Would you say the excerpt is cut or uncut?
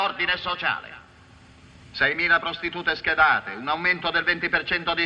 uncut